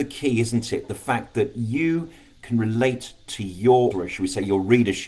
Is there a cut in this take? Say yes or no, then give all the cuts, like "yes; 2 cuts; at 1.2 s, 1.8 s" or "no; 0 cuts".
yes; 1 cut; at 3.9 s